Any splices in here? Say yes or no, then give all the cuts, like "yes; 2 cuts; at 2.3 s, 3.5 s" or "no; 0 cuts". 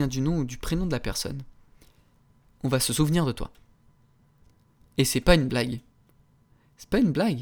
no; 0 cuts